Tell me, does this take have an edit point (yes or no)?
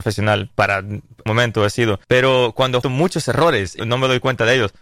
yes